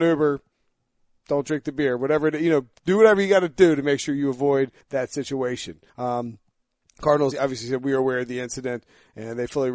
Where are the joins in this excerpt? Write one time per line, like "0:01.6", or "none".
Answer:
0:04.8
0:05.9
0:07.3